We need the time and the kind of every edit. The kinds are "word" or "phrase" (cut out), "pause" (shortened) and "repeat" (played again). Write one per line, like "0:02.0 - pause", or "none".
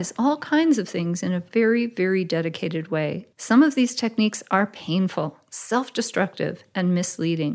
0:03.3 - pause